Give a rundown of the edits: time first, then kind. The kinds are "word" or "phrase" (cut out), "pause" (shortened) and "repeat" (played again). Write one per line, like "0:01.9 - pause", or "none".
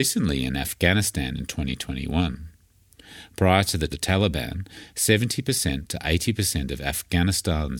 0:03.9 - phrase